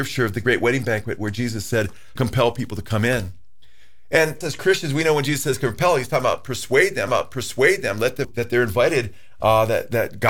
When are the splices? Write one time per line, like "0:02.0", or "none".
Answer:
0:02.2
0:04.4
0:07.1
0:08.2